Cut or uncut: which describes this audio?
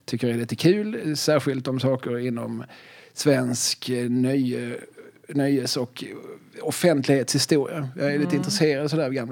uncut